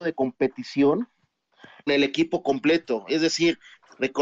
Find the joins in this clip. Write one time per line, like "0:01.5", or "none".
0:01.9